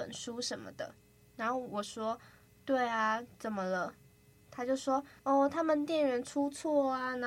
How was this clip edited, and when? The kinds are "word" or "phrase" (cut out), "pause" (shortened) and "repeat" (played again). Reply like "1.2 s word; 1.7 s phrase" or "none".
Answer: 1.0 s pause; 5.2 s pause